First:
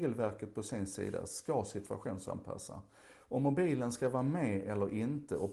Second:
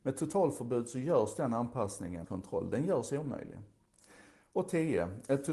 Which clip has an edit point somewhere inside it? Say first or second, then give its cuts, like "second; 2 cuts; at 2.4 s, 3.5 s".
second; 1 cut; at 2.2 s